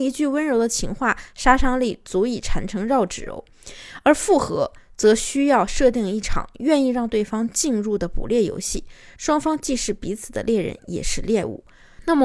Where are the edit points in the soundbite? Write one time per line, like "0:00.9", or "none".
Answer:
none